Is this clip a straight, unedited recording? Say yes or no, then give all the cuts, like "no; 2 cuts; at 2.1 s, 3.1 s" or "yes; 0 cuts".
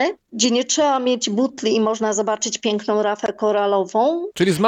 yes; 0 cuts